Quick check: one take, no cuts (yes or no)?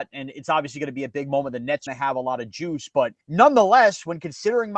no